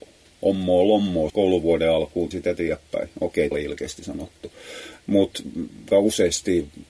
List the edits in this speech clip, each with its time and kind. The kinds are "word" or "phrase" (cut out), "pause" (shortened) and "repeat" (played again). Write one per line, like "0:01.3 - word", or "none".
0:01.3 - word
0:02.3 - word
0:03.5 - word
0:05.9 - phrase